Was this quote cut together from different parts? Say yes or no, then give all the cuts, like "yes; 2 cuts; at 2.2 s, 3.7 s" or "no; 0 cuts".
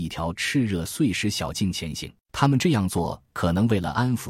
yes; 1 cut; at 2.2 s